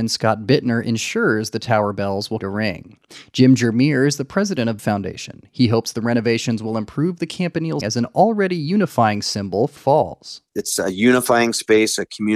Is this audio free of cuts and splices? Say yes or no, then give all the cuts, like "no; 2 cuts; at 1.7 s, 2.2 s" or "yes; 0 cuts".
no; 4 cuts; at 2.4 s, 4.8 s, 7.8 s, 9.8 s